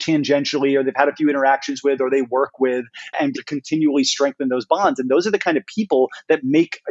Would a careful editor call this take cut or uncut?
cut